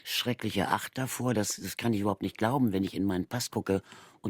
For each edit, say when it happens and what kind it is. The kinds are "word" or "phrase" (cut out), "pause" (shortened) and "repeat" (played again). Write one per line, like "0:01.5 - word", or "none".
none

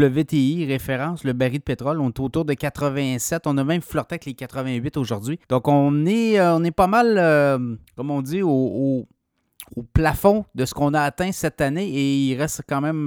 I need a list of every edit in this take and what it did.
0:05.4 - pause
0:07.9 - pause
0:09.7 - word

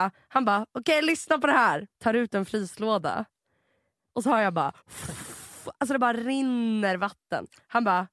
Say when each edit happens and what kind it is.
0:01.9 - pause
0:04.8 - pause

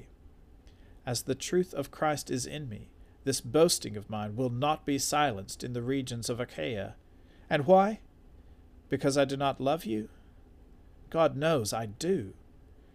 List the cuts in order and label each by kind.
none

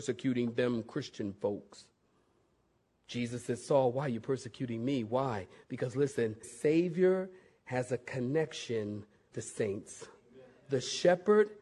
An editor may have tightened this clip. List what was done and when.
0:06.4 - word
0:09.3 - word

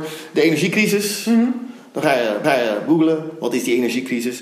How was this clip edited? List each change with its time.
0:02.4 - repeat

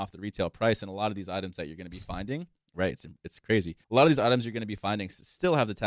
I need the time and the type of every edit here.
0:03.8 - pause

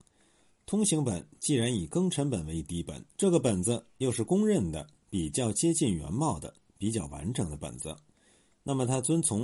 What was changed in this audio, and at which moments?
0:03.1 - pause

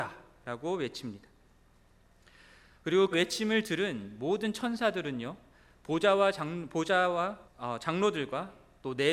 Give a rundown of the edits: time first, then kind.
0:03.1 - word
0:07.4 - word

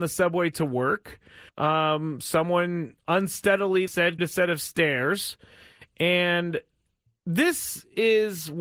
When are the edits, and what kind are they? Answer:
0:01.5 - pause
0:03.9 - word
0:04.2 - word

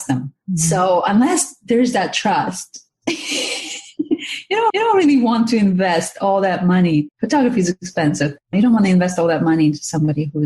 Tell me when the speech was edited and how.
0:04.7 - repeat

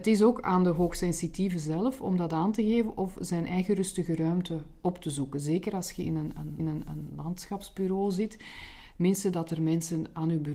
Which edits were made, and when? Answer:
0:06.6 - repeat

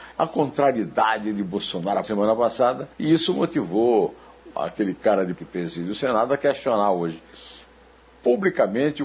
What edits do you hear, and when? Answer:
0:02.0 - phrase
0:02.9 - pause
0:04.5 - word
0:05.3 - phrase

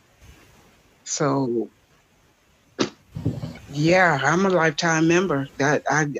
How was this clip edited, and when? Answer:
none

